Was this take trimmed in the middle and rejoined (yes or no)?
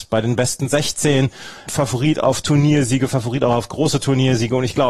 yes